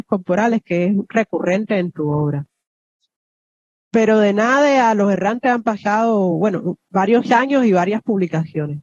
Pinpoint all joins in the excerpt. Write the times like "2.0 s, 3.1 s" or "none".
none

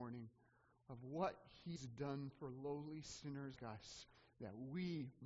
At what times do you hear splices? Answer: 1.8 s, 3.6 s

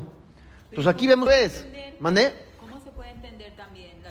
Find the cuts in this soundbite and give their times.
1.3 s

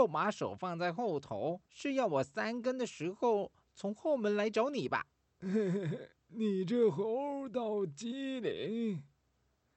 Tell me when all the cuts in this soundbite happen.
1.7 s, 5.1 s

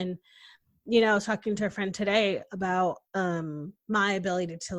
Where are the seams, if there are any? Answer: 3.1 s

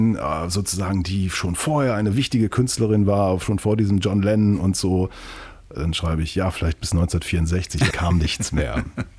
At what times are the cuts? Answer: 7.9 s

